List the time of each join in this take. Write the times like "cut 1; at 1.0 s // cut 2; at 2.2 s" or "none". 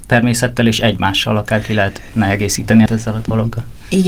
cut 1; at 2.9 s